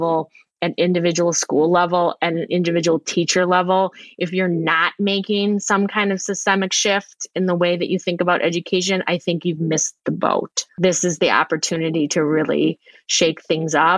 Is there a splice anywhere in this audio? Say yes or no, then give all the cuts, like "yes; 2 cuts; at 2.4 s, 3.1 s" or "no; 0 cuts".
yes; 1 cut; at 10.7 s